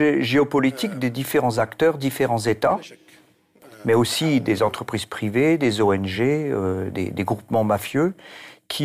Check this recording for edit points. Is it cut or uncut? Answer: uncut